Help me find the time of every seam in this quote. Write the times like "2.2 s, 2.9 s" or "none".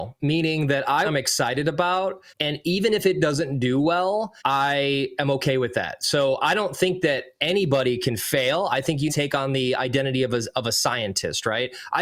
1.0 s, 2.3 s, 4.4 s, 9.1 s